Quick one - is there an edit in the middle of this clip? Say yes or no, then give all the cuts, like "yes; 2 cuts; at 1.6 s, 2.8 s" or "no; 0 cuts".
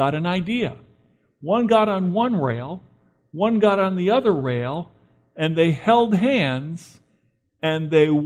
no; 0 cuts